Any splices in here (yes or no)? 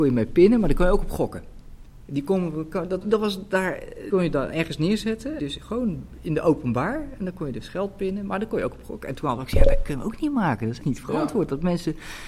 yes